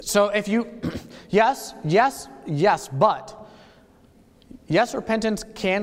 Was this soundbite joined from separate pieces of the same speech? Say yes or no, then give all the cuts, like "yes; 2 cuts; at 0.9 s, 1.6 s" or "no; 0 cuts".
no; 0 cuts